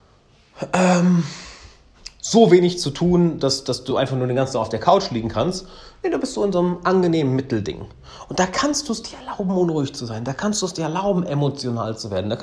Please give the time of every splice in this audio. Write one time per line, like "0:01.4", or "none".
none